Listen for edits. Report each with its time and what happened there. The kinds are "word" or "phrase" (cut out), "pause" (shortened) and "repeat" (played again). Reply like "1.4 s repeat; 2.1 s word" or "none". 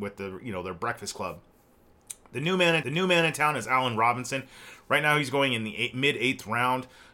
2.8 s repeat

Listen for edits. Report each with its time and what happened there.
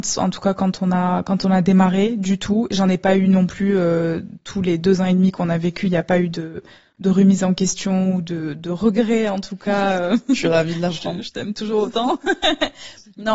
none

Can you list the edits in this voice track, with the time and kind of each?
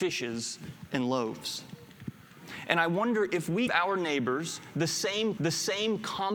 3.7 s word; 5.4 s repeat

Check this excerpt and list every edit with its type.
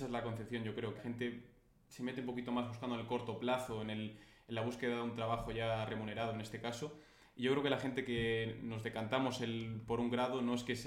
1.0 s word

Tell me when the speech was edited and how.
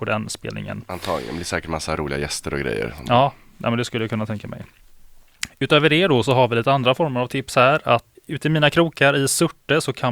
8.2 s word

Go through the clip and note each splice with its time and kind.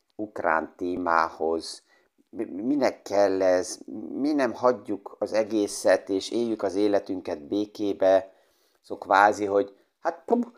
none

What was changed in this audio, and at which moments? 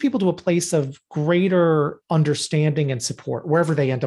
2.0 s pause

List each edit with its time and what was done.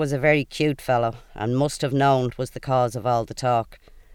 2.3 s word

